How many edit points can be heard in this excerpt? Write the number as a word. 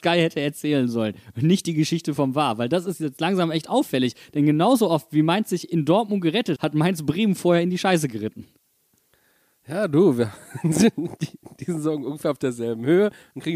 one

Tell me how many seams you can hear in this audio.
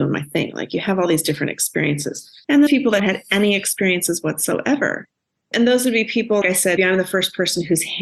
four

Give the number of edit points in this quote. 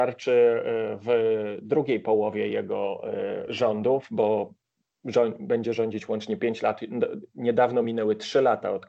zero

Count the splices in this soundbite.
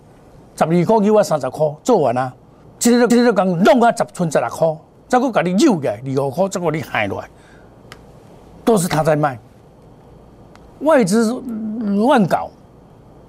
two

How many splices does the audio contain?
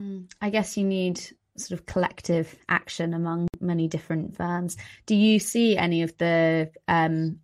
zero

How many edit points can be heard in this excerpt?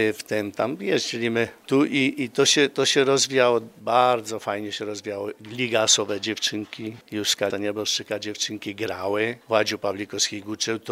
one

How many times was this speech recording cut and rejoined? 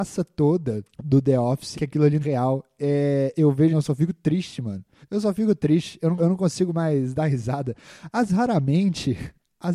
seven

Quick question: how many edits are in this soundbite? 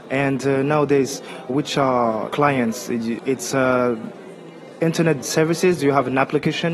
three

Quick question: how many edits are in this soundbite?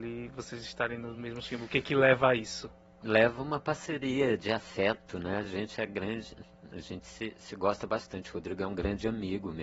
zero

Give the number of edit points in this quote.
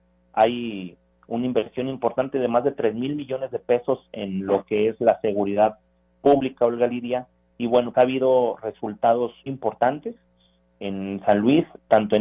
two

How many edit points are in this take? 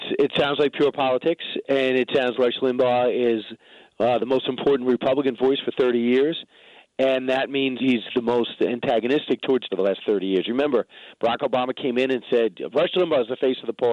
three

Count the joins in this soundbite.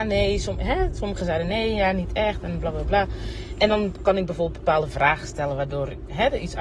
zero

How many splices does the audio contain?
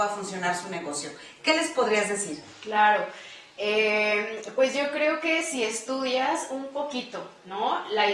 zero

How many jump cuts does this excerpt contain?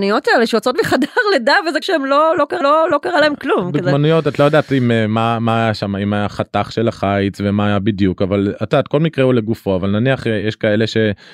two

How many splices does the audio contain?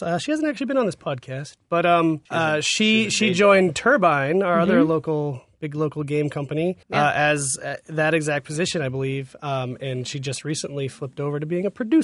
two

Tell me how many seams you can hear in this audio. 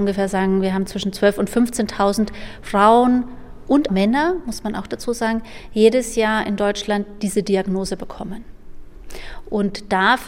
two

